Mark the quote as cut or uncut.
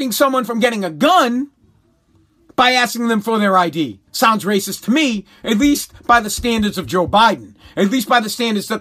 cut